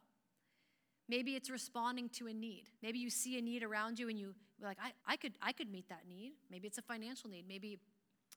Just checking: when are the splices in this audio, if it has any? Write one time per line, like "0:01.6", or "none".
0:02.8
0:05.0

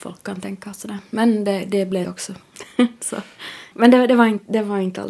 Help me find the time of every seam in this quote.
0:02.0

